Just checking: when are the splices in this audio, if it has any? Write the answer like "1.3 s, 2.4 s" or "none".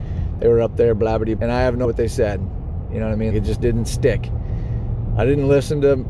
1.4 s, 1.8 s, 3.3 s